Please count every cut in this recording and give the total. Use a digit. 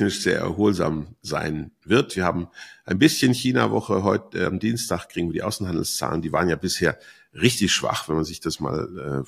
0